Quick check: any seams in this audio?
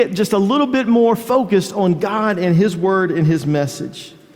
no; 0 cuts

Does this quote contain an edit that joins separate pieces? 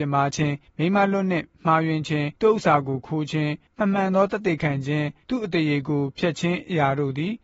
yes; 1 cut; at 2.4 s

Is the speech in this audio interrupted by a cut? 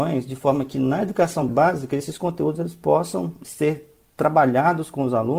no; 0 cuts

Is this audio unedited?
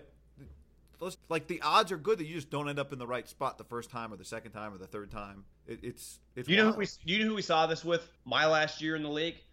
no; 3 cuts; at 1.1 s, 5.5 s, 8.2 s

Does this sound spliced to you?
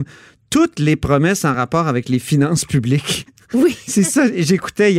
no; 0 cuts

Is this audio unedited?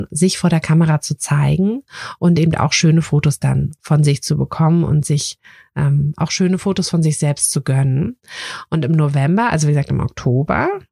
yes; 0 cuts

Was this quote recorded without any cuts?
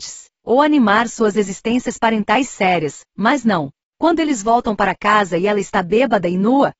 yes; 0 cuts

